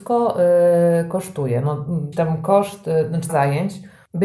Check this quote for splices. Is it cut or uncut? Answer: cut